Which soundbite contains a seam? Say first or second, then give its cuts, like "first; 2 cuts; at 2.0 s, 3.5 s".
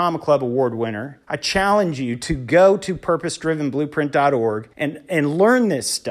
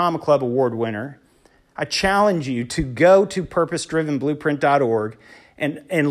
first; 2 cuts; at 1.2 s, 4.7 s